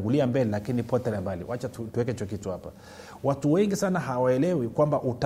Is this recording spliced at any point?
no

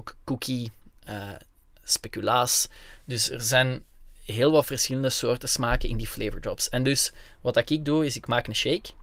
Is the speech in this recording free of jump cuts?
yes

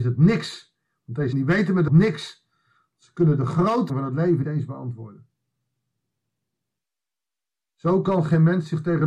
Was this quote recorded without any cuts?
no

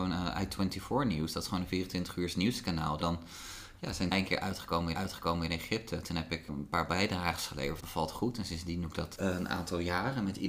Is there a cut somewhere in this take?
yes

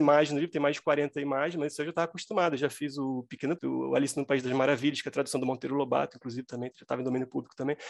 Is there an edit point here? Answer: yes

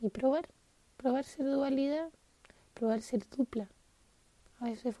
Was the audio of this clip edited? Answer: no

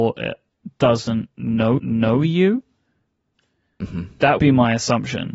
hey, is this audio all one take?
no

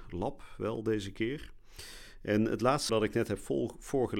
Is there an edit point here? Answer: yes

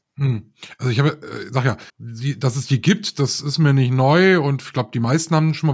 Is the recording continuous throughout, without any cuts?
no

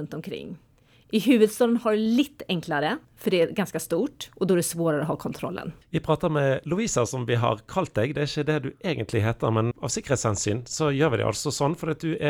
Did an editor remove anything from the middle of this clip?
yes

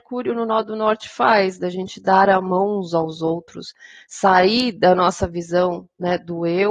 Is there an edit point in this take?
no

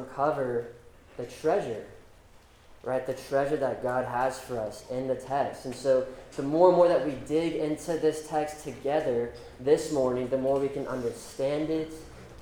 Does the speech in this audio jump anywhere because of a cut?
no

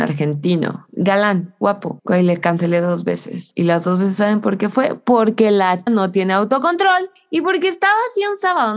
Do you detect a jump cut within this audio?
yes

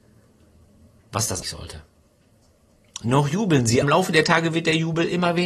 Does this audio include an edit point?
yes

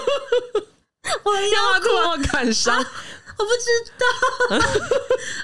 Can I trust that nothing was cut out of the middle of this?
no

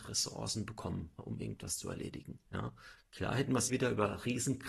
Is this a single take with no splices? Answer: no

